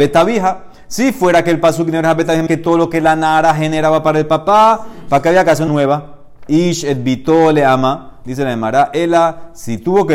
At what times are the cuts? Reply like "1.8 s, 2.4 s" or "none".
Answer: 2.5 s, 5.7 s